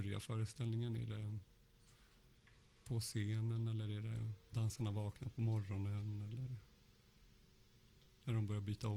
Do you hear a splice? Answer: yes; 1 cut; at 4.5 s

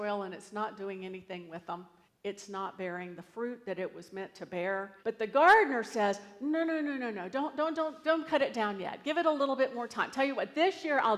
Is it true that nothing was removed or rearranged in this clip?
no; 2 cuts; at 2.1 s, 5.0 s

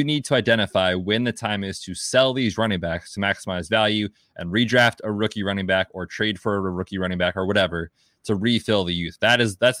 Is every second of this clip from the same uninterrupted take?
yes; 0 cuts

